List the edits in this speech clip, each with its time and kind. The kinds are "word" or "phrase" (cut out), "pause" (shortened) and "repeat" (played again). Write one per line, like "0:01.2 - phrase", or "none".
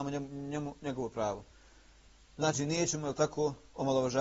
none

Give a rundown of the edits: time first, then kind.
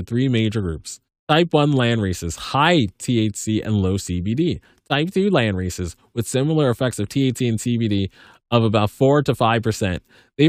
none

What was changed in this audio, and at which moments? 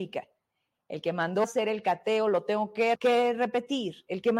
0:01.4 - word
0:02.9 - phrase

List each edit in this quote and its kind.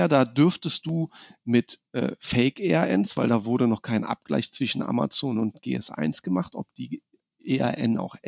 none

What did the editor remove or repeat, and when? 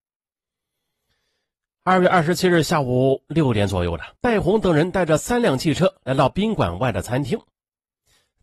0:04.1 - pause

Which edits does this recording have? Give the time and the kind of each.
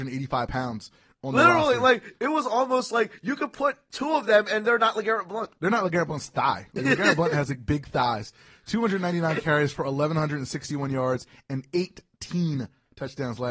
none

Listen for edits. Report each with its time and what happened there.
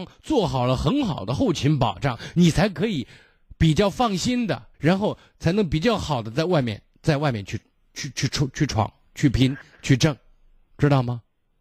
0:04.7 - pause

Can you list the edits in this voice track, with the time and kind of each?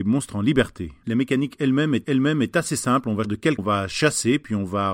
0:02.0 - repeat
0:03.2 - word
0:03.6 - word

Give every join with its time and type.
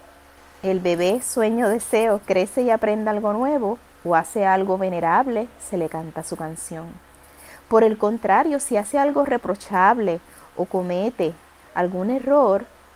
none

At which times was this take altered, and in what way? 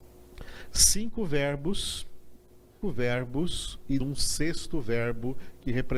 0:02.8 - word
0:04.0 - word

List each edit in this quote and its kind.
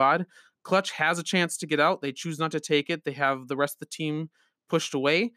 none

